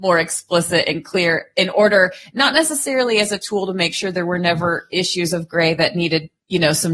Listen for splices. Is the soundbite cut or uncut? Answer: uncut